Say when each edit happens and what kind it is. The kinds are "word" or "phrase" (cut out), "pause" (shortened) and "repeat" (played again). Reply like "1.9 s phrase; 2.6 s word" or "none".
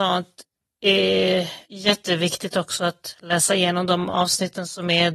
1.6 s pause